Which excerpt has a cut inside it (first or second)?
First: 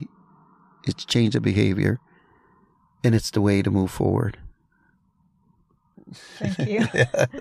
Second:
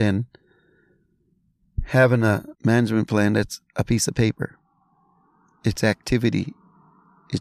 second